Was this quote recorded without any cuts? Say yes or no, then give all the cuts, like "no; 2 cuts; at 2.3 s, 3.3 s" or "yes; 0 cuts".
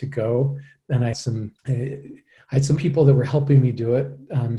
no; 3 cuts; at 1.1 s, 1.6 s, 2.8 s